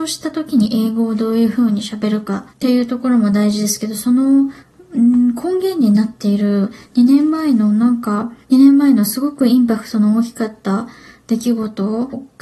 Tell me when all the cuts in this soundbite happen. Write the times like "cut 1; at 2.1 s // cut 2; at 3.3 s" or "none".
cut 1; at 2.5 s // cut 2; at 4.6 s // cut 3; at 8.4 s